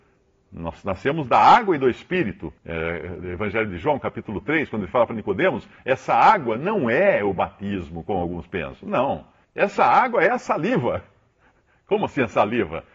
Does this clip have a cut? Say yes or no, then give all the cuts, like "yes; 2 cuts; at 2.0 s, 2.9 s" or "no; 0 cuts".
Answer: yes; 2 cuts; at 2.6 s, 9.4 s